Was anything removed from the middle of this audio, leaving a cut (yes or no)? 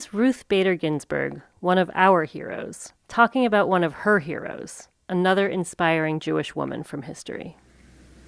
yes